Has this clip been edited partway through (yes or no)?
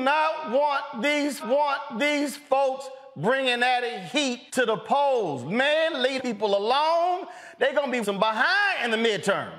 yes